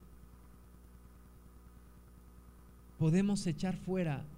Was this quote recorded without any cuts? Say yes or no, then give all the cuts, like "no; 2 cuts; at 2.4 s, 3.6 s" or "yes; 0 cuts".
yes; 0 cuts